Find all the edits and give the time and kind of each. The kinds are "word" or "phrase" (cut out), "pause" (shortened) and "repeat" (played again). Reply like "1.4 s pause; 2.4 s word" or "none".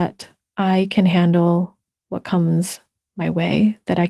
none